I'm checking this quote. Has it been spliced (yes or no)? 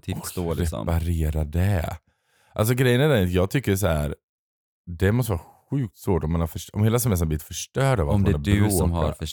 no